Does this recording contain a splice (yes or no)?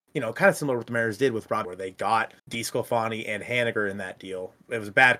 yes